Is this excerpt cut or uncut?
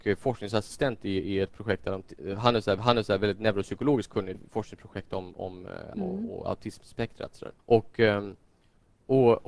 cut